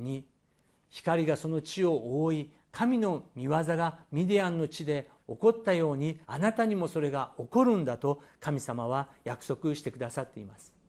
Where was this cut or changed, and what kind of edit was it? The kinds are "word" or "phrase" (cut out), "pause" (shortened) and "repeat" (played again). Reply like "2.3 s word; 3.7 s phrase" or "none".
6.2 s pause